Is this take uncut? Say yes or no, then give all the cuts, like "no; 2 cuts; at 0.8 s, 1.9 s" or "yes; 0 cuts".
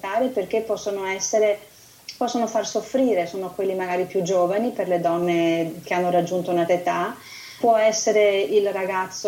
no; 2 cuts; at 6.7 s, 7.6 s